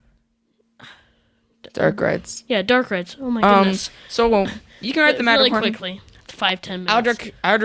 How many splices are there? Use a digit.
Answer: 0